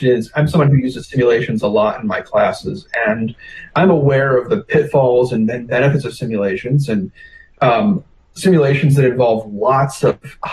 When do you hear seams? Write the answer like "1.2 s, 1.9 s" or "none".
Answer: none